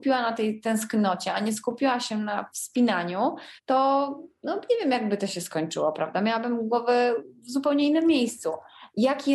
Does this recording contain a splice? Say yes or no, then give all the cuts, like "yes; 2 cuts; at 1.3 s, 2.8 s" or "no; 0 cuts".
yes; 1 cut; at 3.6 s